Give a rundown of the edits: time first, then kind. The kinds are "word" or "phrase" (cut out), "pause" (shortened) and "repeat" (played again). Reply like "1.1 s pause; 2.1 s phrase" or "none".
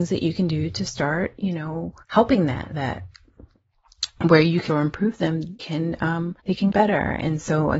2.0 s pause; 2.7 s word; 4.7 s phrase; 5.6 s word; 6.4 s pause; 6.7 s word